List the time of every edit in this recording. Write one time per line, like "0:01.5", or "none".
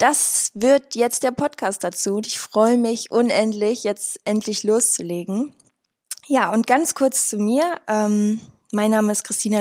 none